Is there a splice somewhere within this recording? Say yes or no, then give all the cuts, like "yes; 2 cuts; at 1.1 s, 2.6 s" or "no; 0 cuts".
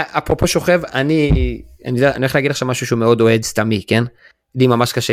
no; 0 cuts